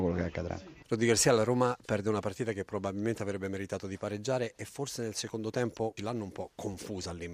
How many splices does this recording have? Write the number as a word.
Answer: one